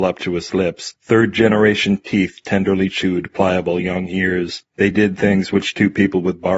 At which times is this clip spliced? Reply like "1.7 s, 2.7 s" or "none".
none